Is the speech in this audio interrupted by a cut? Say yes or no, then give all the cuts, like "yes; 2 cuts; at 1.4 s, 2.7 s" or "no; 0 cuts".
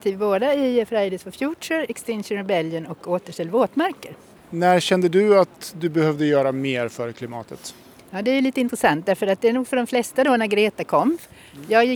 no; 0 cuts